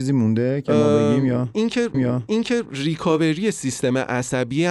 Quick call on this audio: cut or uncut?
cut